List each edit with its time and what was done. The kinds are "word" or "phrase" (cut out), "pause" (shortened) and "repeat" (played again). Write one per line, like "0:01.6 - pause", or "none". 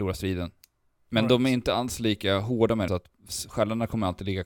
0:02.9 - phrase